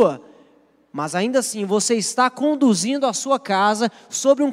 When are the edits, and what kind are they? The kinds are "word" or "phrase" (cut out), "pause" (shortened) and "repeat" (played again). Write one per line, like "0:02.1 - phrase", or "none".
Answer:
none

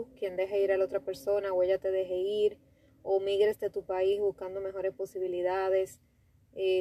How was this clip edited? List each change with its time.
none

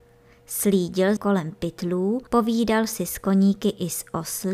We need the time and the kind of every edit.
0:01.2 - word
0:02.3 - pause

